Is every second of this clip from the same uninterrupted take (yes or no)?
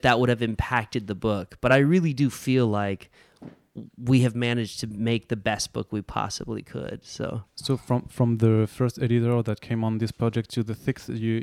yes